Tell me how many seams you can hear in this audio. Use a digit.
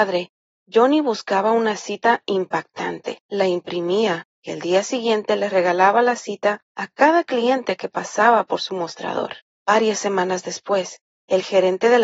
4